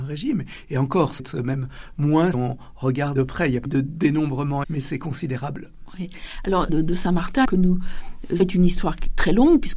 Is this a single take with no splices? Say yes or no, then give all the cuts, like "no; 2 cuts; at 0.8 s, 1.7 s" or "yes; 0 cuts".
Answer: no; 8 cuts; at 1.2 s, 2.3 s, 3.2 s, 3.7 s, 4.6 s, 6.7 s, 7.4 s, 8.4 s